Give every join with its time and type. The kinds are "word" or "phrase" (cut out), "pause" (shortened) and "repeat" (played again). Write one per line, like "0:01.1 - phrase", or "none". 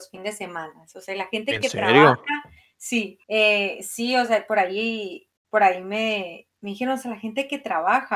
0:03.2 - pause
0:05.4 - pause